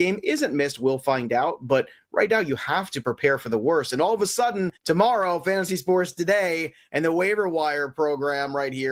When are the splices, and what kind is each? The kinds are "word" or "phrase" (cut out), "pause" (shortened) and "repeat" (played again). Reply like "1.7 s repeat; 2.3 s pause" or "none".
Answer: 4.8 s pause